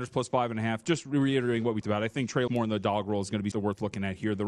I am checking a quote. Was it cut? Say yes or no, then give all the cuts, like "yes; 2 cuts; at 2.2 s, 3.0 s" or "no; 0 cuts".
yes; 3 cuts; at 1.8 s, 2.5 s, 3.5 s